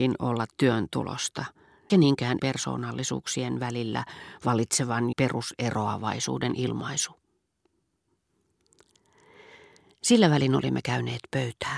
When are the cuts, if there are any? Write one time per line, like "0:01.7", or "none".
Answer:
0:01.9
0:02.4
0:05.1